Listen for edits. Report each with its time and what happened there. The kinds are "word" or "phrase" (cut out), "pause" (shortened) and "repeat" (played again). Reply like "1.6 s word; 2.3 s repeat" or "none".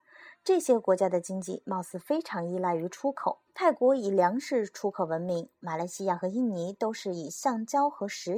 3.5 s pause